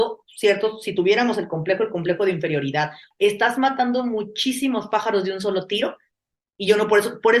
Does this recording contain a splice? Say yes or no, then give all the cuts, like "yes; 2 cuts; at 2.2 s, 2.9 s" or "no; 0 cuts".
no; 0 cuts